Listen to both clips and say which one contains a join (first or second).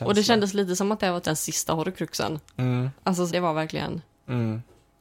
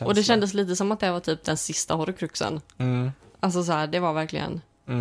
first